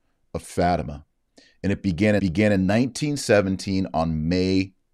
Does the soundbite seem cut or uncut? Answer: cut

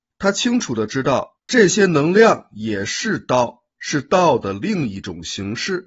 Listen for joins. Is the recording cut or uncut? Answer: cut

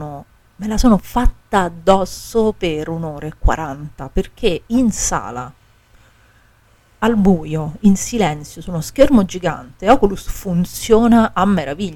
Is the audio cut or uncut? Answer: uncut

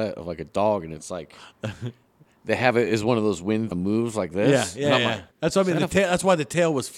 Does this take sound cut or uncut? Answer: cut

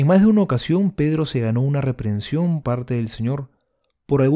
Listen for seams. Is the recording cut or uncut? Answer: cut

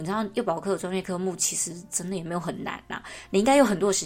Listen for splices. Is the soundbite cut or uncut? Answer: uncut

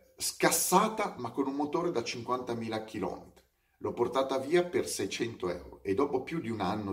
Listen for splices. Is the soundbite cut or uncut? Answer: uncut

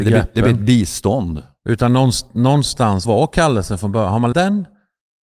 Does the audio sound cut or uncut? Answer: cut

